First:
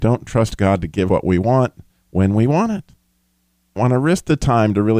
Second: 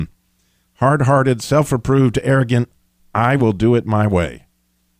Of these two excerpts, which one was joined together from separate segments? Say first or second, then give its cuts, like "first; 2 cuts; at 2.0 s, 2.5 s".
first; 2 cuts; at 1.1 s, 3.8 s